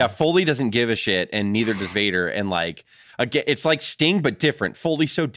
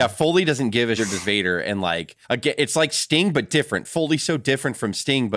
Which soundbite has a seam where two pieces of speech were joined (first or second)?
second